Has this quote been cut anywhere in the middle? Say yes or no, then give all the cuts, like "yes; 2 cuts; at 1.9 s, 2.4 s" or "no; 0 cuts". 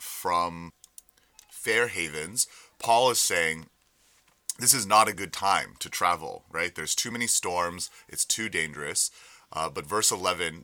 no; 0 cuts